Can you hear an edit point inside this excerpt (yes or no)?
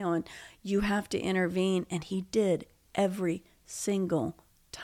no